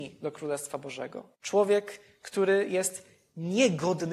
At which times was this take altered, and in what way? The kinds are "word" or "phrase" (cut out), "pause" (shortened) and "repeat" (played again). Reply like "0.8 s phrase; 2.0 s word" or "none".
1.3 s pause